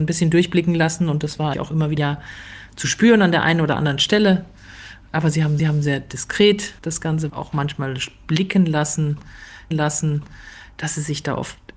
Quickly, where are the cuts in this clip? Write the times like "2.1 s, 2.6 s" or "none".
1.5 s, 2.0 s, 5.6 s, 6.8 s, 7.3 s, 9.7 s